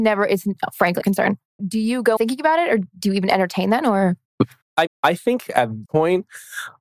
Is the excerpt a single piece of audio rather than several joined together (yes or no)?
no